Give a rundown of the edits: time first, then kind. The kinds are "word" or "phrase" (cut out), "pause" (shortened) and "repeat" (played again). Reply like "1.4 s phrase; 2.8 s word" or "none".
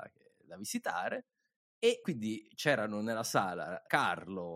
none